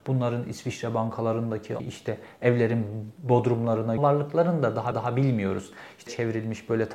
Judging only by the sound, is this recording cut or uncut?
cut